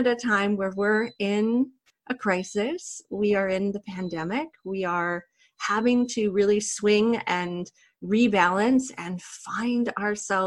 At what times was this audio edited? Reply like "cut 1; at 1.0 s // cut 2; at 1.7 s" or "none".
none